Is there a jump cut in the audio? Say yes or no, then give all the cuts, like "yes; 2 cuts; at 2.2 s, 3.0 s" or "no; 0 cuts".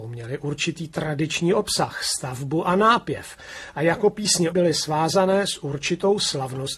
yes; 1 cut; at 4.5 s